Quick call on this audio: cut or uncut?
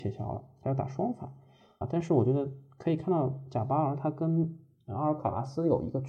cut